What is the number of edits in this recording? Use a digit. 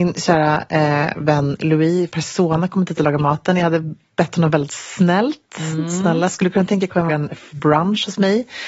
3